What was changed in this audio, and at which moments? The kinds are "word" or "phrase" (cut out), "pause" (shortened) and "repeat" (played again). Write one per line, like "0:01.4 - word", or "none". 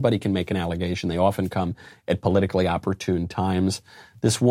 none